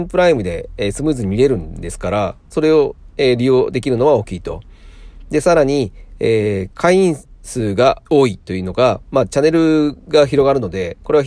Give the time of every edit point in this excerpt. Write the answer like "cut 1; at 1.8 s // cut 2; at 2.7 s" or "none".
cut 1; at 8.1 s